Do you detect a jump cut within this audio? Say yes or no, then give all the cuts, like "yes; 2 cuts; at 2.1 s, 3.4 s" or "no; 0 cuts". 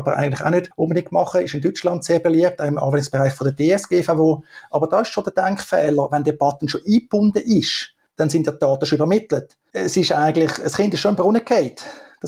no; 0 cuts